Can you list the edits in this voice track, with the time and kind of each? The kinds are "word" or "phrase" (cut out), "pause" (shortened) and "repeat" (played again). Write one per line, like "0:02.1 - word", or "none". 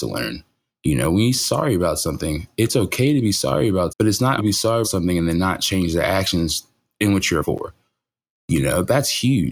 0:01.4 - word
0:03.9 - word
0:04.4 - word
0:04.8 - word
0:07.4 - word